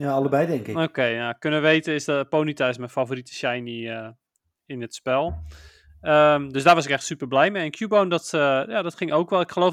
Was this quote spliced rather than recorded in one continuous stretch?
no; 0 cuts

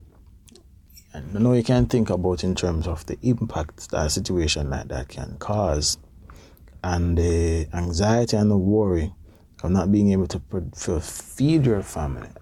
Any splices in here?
no; 0 cuts

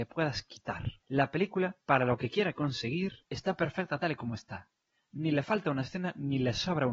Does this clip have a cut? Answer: yes; 3 cuts; at 1.0 s, 1.8 s, 3.2 s

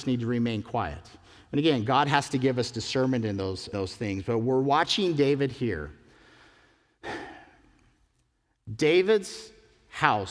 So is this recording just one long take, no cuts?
no; 1 cut; at 3.7 s

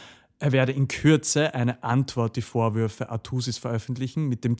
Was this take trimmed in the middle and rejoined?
yes; 1 cut; at 2.3 s

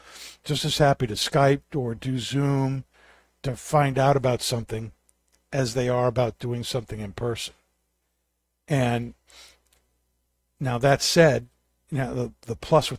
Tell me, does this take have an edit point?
no; 0 cuts

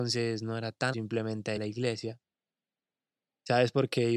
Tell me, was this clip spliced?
yes; 2 cuts; at 0.9 s, 1.6 s

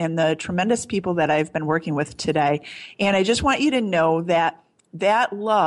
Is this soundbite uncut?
yes; 0 cuts

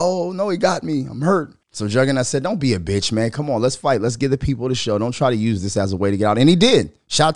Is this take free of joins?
no; 1 cut; at 1.6 s

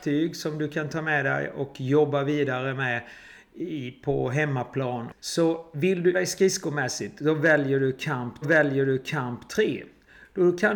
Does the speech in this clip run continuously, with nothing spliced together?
no; 3 cuts; at 5.2 s, 6.1 s, 8.4 s

